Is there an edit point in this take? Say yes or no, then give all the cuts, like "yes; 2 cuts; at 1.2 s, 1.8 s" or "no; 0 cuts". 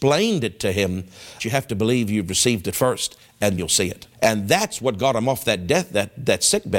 yes; 3 cuts; at 1.4 s, 3.6 s, 4.1 s